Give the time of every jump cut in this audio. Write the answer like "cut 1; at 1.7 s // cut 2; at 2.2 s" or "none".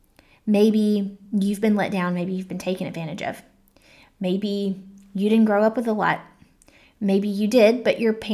none